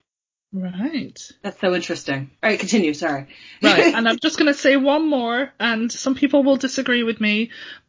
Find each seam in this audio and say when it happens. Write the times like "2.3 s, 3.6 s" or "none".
2.4 s